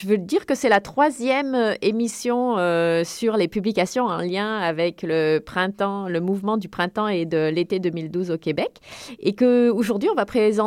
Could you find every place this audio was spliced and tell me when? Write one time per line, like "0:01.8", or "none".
none

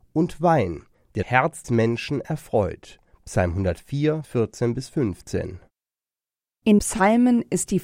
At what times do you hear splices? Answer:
0:01.2
0:01.6
0:04.2
0:06.8

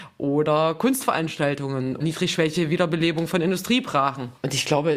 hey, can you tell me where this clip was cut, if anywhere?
0:02.0

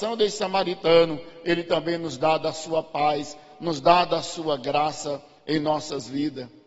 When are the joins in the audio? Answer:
none

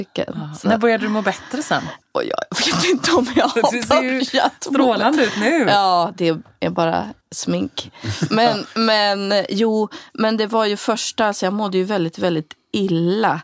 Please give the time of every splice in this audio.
0:07.2

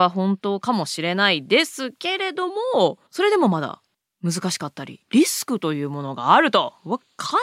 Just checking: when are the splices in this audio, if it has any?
0:03.1
0:03.9
0:05.0

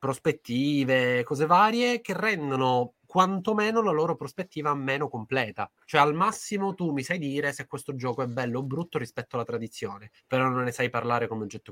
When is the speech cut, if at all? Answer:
0:03.0
0:10.2

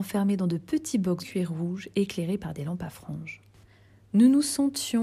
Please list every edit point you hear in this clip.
0:01.2

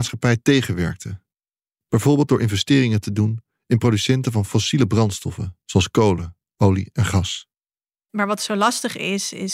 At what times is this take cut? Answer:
none

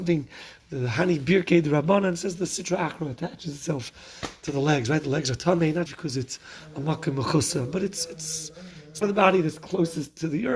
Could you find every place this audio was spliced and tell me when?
0:05.9
0:09.0

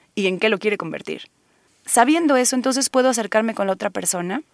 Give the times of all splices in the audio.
0:01.7

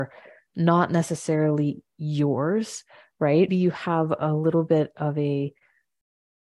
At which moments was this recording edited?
0:03.5

